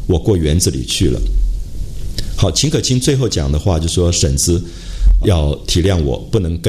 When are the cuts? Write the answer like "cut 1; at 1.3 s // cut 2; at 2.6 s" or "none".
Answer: cut 1; at 5.2 s